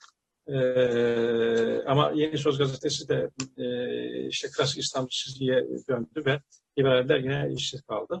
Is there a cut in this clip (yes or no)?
no